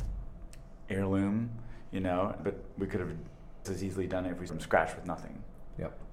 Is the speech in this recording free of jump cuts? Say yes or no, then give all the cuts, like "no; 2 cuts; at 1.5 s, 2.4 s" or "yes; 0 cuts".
no; 3 cuts; at 2.4 s, 3.6 s, 4.5 s